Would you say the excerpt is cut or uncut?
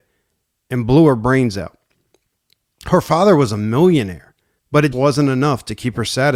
cut